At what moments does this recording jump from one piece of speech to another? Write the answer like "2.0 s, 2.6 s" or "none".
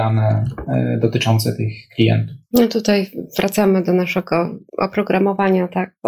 2.4 s, 4.7 s